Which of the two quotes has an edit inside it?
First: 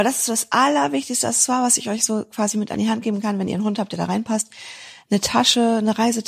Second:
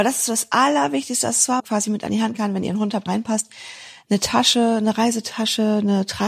second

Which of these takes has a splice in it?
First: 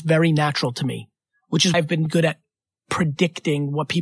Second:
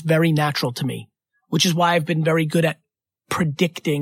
first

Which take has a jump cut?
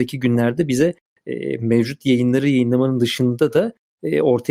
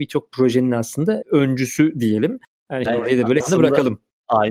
second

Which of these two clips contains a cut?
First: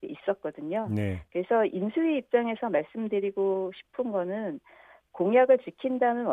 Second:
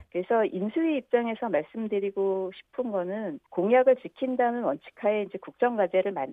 second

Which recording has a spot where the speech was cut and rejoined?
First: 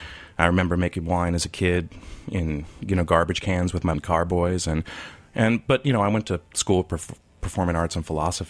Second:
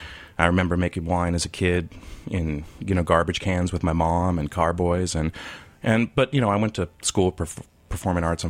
first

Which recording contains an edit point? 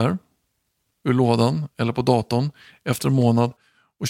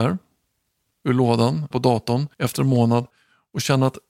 second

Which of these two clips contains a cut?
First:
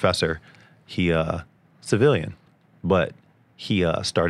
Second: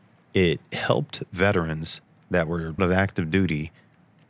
second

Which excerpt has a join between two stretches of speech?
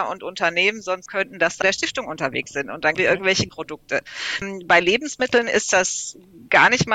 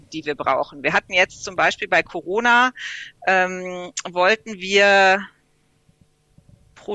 first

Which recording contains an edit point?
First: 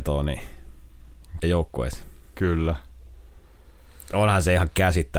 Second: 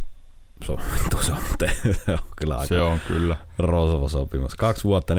first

